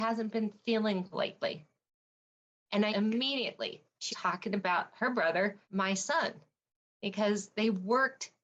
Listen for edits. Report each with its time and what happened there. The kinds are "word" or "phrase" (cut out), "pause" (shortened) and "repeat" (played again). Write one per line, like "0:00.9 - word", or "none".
0:01.1 - word
0:02.9 - word
0:04.1 - word
0:05.6 - pause